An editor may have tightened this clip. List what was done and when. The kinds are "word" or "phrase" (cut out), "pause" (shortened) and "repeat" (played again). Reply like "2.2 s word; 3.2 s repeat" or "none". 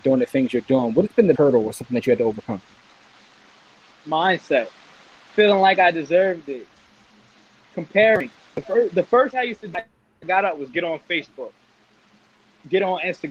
1.3 s word; 5.3 s word; 9.3 s word; 9.7 s word